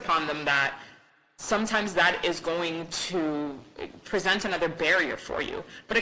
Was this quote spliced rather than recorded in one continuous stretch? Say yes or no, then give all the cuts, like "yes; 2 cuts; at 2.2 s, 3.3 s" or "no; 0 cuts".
no; 0 cuts